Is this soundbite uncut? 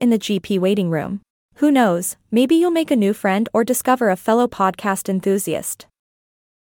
no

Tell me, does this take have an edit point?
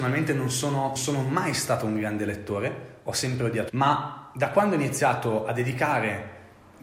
yes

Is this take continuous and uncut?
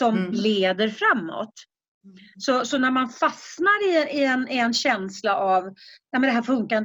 yes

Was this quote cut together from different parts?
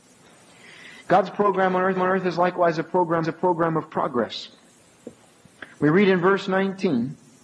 yes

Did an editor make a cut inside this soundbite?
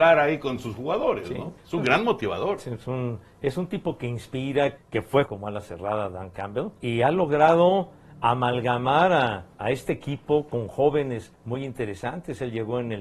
yes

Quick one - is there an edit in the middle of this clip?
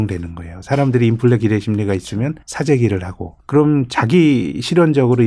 yes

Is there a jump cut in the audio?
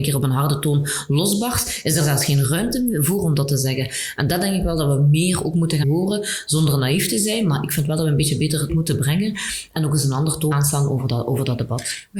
yes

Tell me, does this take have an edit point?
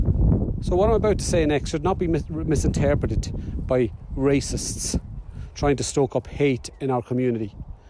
no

